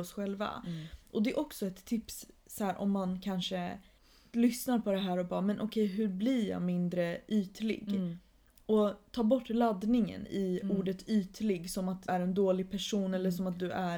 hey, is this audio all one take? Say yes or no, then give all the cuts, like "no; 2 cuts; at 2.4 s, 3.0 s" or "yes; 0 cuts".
no; 1 cut; at 12.1 s